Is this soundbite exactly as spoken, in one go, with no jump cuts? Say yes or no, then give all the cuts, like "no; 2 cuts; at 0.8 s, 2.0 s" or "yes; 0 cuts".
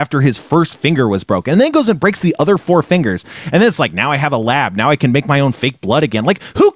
yes; 0 cuts